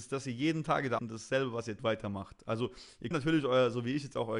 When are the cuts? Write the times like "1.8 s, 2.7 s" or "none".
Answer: 1.0 s, 1.8 s, 3.1 s